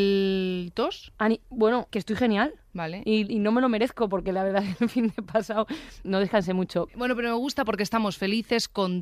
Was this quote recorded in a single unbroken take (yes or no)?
no